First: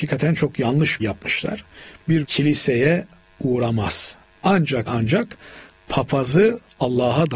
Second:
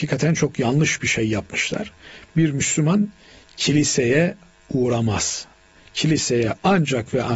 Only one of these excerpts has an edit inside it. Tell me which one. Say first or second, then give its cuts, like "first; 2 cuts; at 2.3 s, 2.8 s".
first; 4 cuts; at 1.0 s, 2.2 s, 4.4 s, 4.9 s